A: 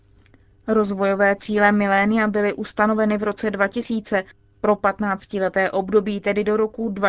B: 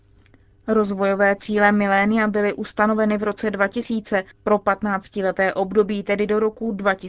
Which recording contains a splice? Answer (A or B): B